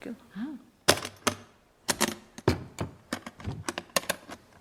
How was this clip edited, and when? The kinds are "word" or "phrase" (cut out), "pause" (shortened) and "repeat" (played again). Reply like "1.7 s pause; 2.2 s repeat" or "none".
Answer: none